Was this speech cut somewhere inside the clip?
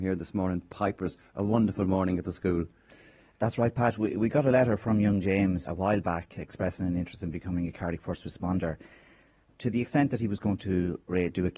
yes; 1 cut; at 5.7 s

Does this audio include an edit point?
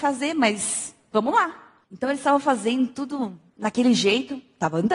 yes; 2 cuts; at 1.8 s, 3.5 s

